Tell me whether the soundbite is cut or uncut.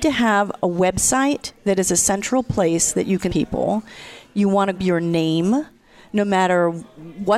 cut